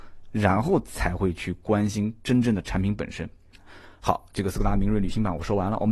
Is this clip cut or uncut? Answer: uncut